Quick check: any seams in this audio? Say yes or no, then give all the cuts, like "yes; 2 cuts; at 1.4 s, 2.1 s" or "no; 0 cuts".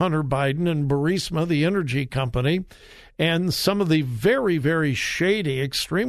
no; 0 cuts